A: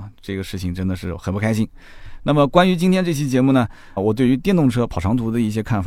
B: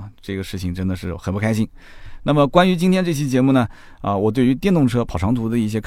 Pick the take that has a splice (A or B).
A